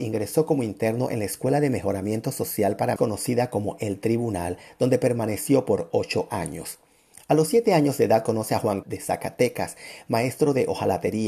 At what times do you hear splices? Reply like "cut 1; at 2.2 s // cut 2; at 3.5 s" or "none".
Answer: cut 1; at 3.0 s // cut 2; at 8.8 s